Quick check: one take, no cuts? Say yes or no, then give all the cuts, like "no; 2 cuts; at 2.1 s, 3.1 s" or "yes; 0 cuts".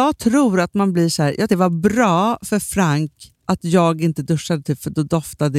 no; 2 cuts; at 1.5 s, 3.4 s